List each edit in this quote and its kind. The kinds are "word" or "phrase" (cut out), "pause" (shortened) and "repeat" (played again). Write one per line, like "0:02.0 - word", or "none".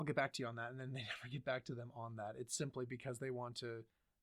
none